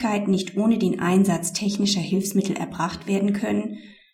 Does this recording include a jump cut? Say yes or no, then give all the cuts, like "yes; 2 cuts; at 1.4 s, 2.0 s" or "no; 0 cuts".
no; 0 cuts